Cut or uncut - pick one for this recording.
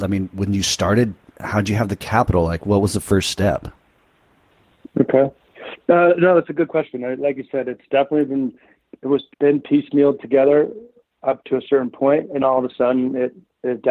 cut